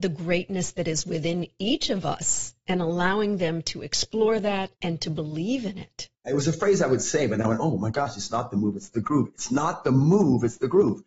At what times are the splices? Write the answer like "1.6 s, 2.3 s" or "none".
4.7 s, 6.1 s